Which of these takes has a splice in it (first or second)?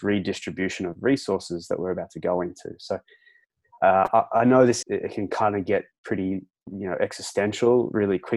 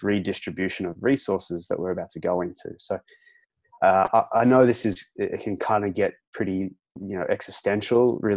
first